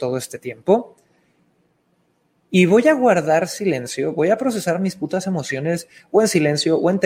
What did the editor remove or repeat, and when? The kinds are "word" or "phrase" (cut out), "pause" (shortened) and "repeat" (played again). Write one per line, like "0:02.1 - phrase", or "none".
none